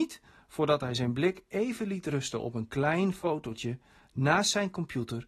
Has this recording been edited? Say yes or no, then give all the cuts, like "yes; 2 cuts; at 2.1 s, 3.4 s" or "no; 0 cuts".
no; 0 cuts